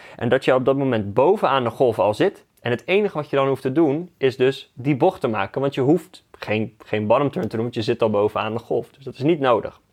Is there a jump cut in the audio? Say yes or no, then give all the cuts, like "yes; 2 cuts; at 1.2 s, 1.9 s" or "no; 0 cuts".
no; 0 cuts